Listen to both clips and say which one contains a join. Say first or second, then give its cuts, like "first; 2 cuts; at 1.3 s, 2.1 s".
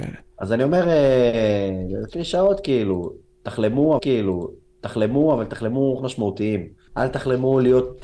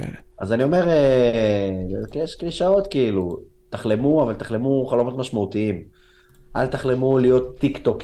first; 4 cuts; at 2.1 s, 4.0 s, 6.0 s, 6.9 s